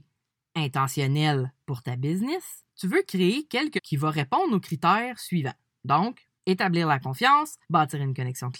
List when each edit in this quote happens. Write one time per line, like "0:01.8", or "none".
0:02.7
0:03.8
0:06.4
0:07.6